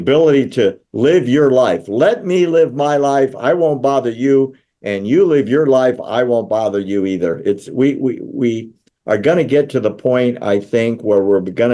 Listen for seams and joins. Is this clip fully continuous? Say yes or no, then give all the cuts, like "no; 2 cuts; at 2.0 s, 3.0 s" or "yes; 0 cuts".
yes; 0 cuts